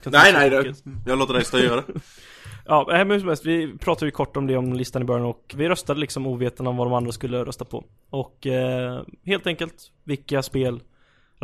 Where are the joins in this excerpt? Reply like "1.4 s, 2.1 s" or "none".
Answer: 5.5 s